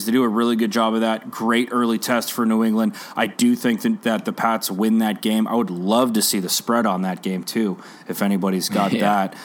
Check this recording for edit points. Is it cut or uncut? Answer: uncut